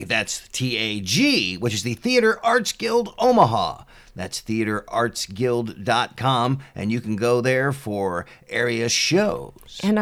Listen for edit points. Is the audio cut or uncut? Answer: uncut